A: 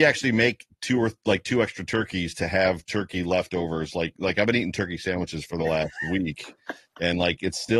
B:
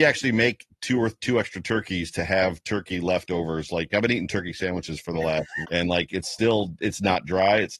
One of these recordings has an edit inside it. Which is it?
B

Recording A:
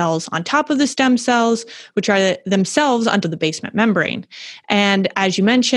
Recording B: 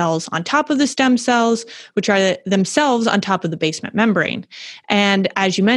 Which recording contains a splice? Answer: A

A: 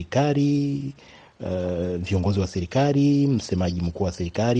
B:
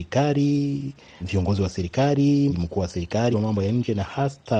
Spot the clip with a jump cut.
B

